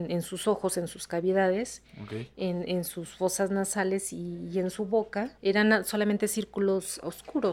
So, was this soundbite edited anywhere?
yes; 1 cut; at 5.4 s

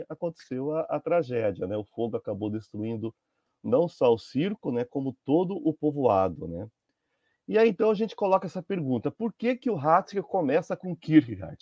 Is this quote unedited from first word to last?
yes; 0 cuts

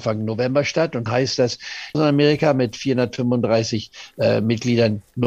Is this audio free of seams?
no; 2 cuts; at 1.1 s, 1.9 s

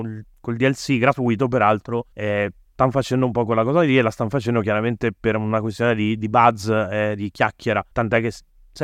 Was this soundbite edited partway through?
yes; 2 cuts; at 2.1 s, 7.9 s

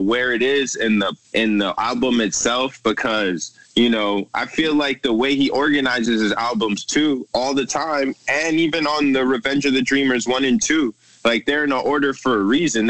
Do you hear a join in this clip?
yes; 2 cuts; at 1.2 s, 3.6 s

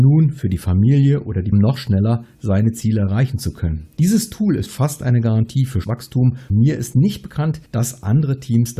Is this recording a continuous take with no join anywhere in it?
no; 6 cuts; at 1.5 s, 3.9 s, 4.7 s, 5.8 s, 6.5 s, 7.7 s

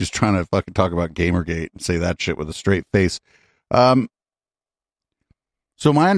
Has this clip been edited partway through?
no; 0 cuts

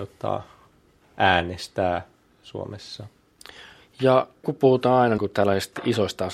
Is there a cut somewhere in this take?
yes; 2 cuts; at 4.4 s, 5.2 s

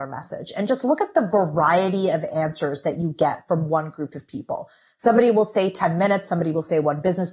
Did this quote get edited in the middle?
no; 0 cuts

